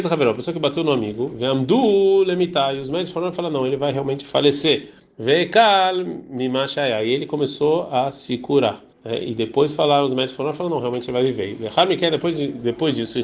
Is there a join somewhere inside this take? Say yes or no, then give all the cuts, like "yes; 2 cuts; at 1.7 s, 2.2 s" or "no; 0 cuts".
yes; 2 cuts; at 5.0 s, 8.9 s